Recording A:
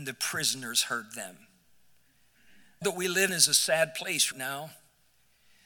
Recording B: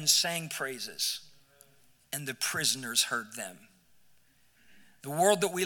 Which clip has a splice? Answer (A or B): A